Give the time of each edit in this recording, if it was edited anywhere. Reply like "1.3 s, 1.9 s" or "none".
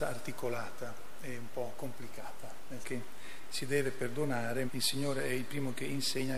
2.8 s, 4.7 s